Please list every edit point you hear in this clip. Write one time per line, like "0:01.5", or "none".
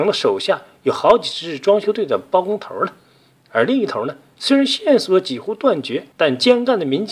0:06.1